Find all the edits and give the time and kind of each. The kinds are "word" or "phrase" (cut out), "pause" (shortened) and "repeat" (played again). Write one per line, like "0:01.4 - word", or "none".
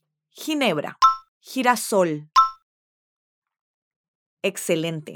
0:01.3 - pause